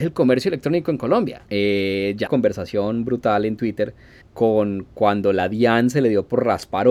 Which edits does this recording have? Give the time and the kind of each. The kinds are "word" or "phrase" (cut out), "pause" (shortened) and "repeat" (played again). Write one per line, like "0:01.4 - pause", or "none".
0:01.5 - pause
0:02.3 - phrase
0:04.2 - pause